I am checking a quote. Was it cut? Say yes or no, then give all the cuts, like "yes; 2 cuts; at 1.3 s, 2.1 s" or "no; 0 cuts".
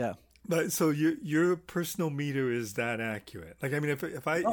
no; 0 cuts